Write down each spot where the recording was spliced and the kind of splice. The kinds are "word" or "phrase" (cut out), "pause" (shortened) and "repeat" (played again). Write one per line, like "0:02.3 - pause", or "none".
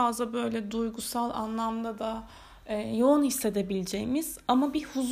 none